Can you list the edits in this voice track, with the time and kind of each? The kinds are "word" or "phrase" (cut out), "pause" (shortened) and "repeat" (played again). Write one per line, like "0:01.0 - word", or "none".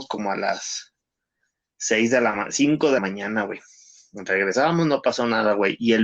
0:03.0 - word